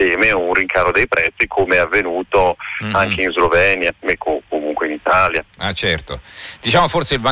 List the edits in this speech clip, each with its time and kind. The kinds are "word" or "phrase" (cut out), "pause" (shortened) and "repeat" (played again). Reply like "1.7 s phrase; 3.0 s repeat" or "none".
none

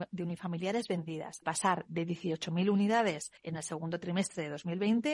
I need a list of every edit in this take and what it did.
1.4 s word; 3.4 s pause

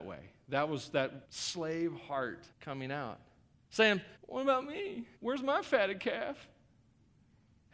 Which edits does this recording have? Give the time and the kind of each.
1.2 s pause; 2.5 s pause; 4.2 s pause; 5.2 s pause

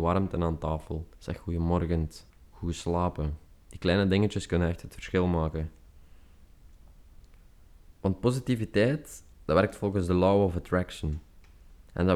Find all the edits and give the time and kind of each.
1.1 s pause; 2.3 s pause; 3.5 s pause; 8.0 s pause; 9.3 s pause

